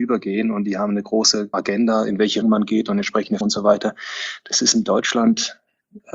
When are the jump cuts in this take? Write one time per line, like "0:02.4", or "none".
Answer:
0:01.5
0:02.4
0:03.4